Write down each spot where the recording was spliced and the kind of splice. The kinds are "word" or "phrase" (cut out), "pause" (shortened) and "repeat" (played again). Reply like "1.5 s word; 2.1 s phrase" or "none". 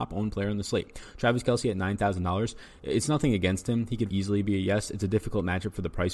4.1 s word